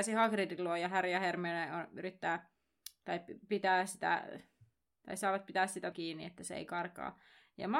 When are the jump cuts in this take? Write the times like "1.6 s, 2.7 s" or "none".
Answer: 5.9 s